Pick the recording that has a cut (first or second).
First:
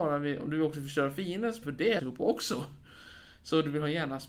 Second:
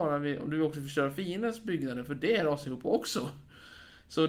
first